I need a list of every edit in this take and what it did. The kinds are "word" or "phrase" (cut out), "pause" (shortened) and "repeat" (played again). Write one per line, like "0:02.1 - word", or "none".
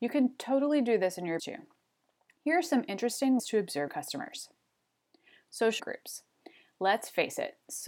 0:01.4 - word
0:03.4 - word
0:03.9 - word
0:05.8 - word